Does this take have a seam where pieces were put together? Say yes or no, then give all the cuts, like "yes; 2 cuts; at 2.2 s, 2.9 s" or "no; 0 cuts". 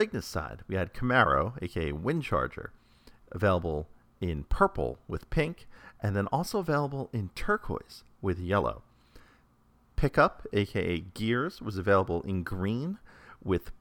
no; 0 cuts